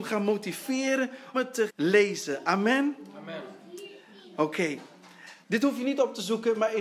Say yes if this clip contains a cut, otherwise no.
yes